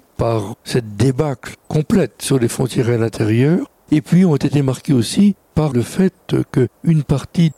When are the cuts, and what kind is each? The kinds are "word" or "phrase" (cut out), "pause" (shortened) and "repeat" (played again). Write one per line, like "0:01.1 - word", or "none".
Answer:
none